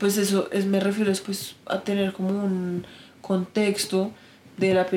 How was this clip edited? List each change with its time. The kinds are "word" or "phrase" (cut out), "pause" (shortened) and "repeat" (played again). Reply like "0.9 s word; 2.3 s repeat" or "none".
1.2 s phrase